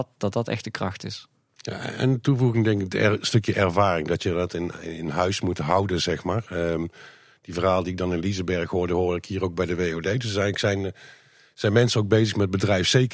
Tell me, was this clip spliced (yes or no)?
no